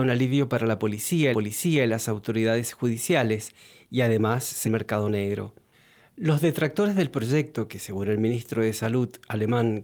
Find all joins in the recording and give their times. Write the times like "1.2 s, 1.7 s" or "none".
1.3 s, 4.6 s, 5.7 s